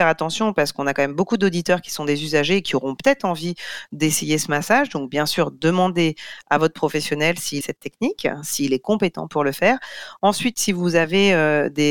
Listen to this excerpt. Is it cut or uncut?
cut